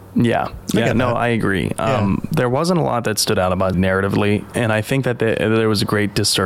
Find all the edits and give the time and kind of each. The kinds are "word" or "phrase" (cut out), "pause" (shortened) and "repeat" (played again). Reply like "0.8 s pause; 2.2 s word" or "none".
3.7 s word; 4.5 s word